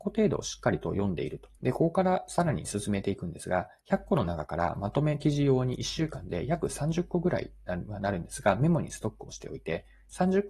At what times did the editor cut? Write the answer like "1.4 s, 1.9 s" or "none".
1.6 s, 3.8 s